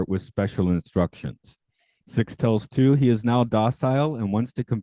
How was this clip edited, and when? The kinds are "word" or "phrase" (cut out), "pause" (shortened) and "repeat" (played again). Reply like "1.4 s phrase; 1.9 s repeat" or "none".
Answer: none